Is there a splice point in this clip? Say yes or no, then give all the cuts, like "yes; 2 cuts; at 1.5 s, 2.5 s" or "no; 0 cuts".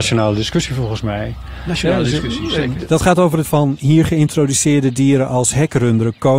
yes; 1 cut; at 3.4 s